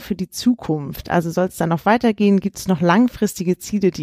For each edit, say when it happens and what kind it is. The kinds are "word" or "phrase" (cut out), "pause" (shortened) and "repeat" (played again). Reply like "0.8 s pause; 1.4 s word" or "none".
none